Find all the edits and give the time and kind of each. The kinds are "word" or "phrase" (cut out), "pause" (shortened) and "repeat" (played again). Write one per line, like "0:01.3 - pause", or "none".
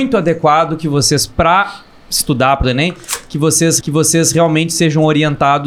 0:02.6 - phrase
0:03.8 - repeat

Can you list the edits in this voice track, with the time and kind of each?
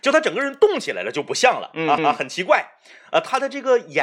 0:02.0 - repeat

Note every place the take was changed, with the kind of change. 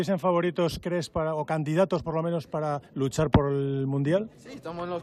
0:02.9 - pause

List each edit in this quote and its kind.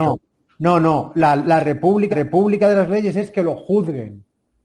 0:02.1 - repeat

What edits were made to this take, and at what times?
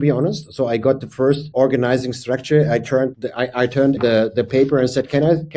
0:01.5 - word
0:03.1 - word
0:04.0 - word

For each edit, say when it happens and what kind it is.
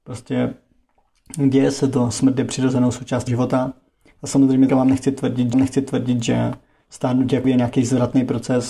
0:03.3 - word
0:04.7 - word
0:05.5 - repeat
0:07.4 - word

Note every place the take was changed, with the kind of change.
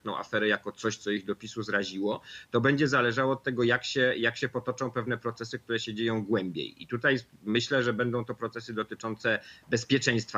none

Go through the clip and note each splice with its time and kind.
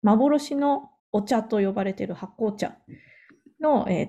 0:01.0 - pause

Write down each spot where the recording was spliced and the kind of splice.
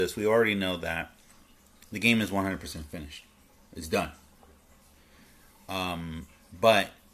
none

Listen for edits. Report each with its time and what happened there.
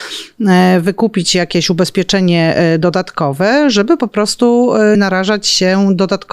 0:04.9 - word

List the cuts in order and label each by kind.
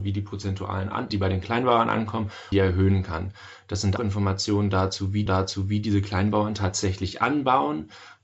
0:01.1 - phrase
0:02.5 - phrase
0:04.0 - word
0:05.3 - repeat

